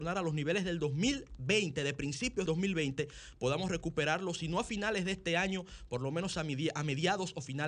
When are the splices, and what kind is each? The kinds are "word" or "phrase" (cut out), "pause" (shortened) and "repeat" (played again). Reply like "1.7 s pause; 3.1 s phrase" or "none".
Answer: 2.5 s word